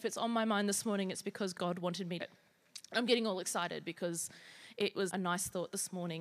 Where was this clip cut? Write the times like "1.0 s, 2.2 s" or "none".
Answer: 1.5 s, 2.2 s, 5.1 s